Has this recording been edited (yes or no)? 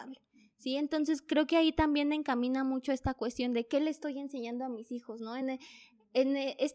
no